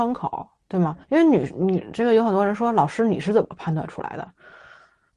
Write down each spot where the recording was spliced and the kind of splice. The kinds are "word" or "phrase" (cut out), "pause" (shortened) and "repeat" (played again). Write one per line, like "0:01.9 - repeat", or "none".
0:01.0 - pause